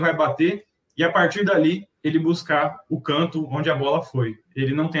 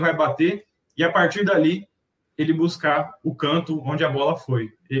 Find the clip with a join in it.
first; 1 cut; at 1.9 s

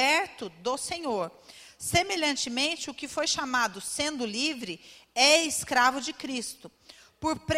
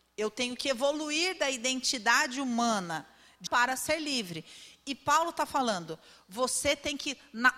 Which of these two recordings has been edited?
second; 1 cut; at 3.5 s

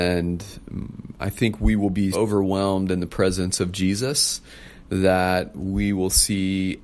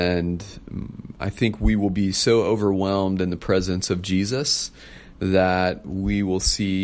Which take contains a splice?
first; 1 cut; at 2.1 s

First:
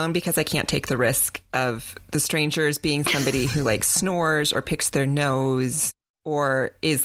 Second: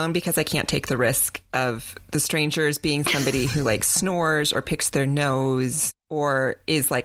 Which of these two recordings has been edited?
second; 1 cut; at 6.0 s

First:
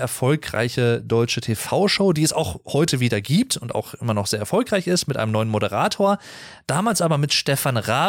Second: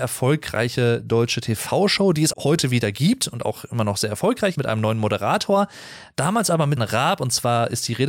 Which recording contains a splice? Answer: second; 3 cuts; at 2.3 s, 4.5 s, 6.8 s

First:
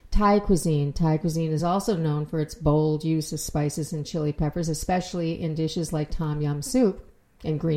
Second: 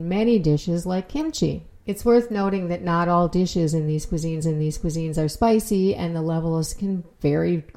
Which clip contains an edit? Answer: second; 3 cuts; at 1.8 s, 4.4 s, 6.7 s

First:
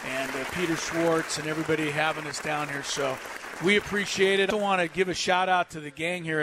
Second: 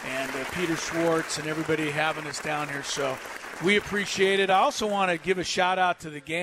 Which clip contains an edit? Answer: first; 1 cut; at 4.5 s

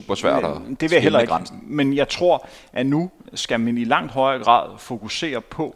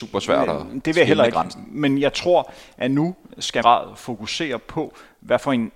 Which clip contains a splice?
second; 1 cut; at 3.6 s

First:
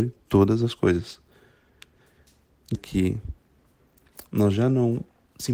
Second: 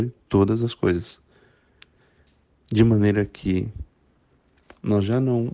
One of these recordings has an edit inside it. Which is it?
first; 1 cut; at 2.7 s

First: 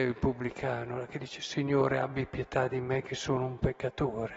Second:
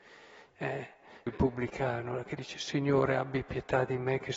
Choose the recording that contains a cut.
second; 1 cut; at 1.3 s

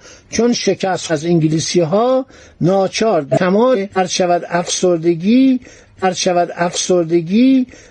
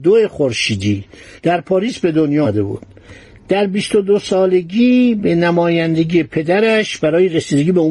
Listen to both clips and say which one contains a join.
first; 2 cuts; at 1.1 s, 6.0 s

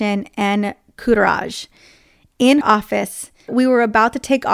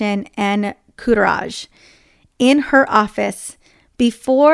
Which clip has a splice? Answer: first; 2 cuts; at 2.6 s, 3.5 s

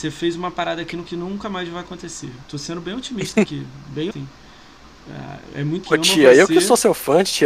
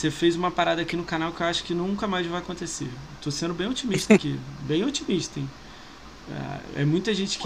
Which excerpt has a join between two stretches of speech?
first; 4 cuts; at 1.1 s, 2.4 s, 4.1 s, 5.8 s

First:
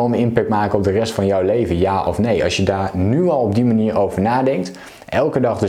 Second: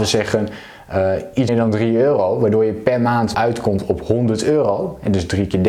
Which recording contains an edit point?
second; 2 cuts; at 1.5 s, 3.3 s

